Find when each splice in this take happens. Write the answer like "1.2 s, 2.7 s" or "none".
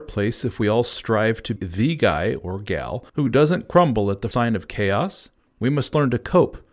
1.6 s, 3.1 s, 4.3 s, 5.5 s